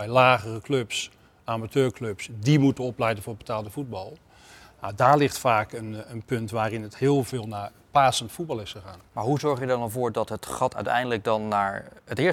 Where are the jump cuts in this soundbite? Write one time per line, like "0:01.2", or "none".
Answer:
none